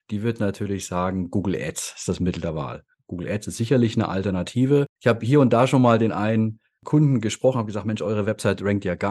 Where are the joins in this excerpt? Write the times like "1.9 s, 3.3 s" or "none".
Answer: 4.9 s

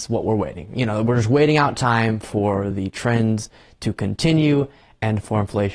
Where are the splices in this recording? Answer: none

